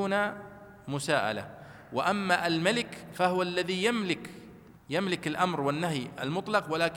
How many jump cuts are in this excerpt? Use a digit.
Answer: 1